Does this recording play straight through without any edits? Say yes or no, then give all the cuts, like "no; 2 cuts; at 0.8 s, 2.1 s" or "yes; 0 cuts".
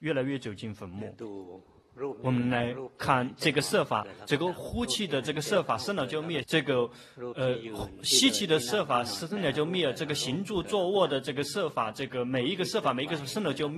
no; 1 cut; at 6.4 s